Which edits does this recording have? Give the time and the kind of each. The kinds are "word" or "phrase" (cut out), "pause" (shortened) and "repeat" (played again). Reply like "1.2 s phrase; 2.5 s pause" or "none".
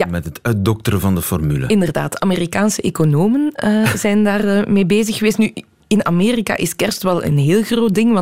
none